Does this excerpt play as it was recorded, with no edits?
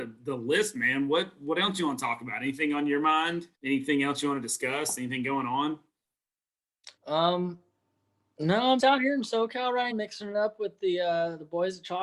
no; 4 cuts; at 3.5 s, 7.0 s, 8.8 s, 9.9 s

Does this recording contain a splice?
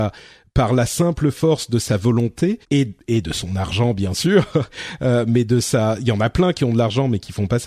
yes; 1 cut; at 2.6 s

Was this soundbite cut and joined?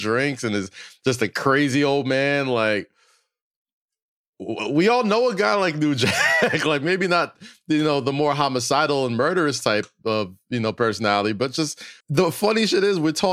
yes; 1 cut; at 12.0 s

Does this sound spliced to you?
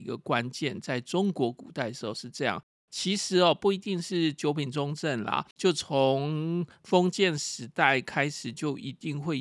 yes; 1 cut; at 5.5 s

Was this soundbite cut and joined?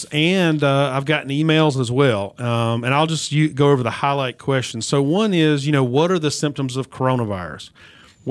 no; 0 cuts

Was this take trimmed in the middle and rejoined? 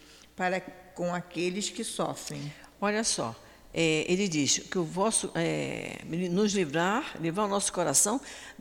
no; 0 cuts

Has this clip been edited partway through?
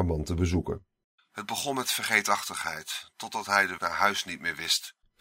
yes; 1 cut; at 3.8 s

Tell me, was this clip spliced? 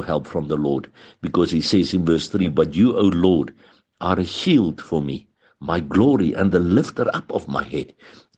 no; 0 cuts

